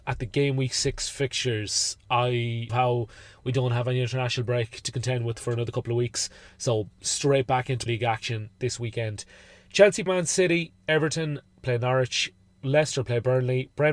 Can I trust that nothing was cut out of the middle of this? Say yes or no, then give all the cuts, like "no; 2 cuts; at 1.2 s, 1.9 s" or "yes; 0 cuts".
no; 3 cuts; at 2.7 s, 7.9 s, 10.1 s